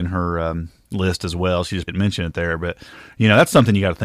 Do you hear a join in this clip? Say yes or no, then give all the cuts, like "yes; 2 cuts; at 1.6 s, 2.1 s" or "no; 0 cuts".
yes; 1 cut; at 1.9 s